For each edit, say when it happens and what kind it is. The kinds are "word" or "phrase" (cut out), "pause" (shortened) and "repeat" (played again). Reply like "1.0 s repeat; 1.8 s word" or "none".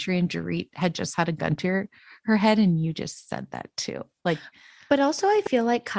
none